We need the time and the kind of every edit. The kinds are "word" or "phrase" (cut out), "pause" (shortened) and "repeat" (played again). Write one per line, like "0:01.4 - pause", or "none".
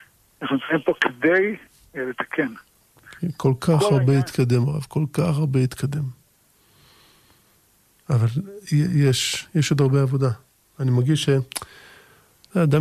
none